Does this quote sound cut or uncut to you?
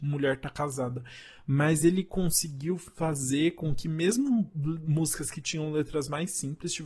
uncut